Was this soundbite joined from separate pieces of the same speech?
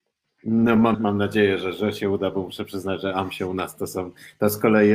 yes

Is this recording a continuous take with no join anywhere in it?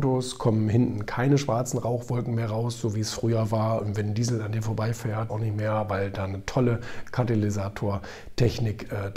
no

